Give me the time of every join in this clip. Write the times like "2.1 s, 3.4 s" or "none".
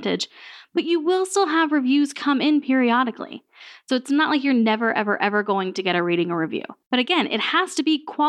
6.8 s